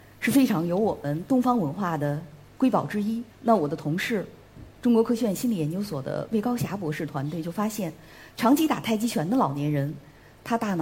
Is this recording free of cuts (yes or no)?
no